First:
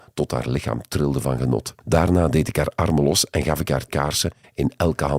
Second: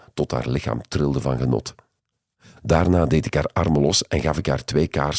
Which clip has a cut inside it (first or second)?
first